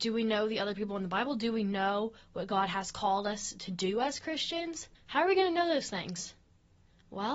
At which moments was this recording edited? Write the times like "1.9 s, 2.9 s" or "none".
4.9 s